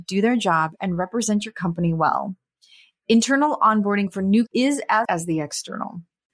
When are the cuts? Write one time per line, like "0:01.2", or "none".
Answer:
0:04.5
0:05.0